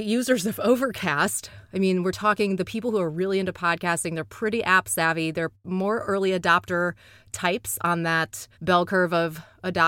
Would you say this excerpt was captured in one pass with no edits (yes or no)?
no